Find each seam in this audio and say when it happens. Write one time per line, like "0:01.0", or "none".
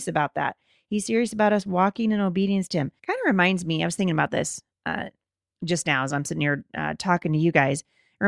0:03.0